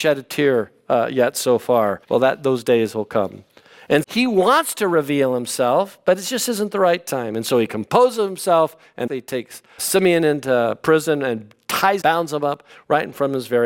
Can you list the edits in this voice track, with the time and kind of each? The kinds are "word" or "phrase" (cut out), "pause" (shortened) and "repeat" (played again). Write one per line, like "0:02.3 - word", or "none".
0:02.0 - pause
0:04.0 - word
0:09.1 - phrase
0:09.8 - word
0:12.0 - phrase